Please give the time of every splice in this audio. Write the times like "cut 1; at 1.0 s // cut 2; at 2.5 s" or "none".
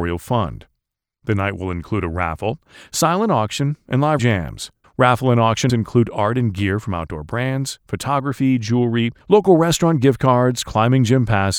cut 1; at 4.2 s // cut 2; at 4.8 s // cut 3; at 5.7 s // cut 4; at 9.2 s